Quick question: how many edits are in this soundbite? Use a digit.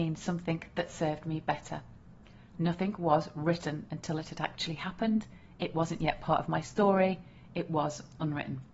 0